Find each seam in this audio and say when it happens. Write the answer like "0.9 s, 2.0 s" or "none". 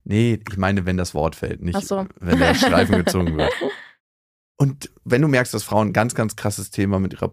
none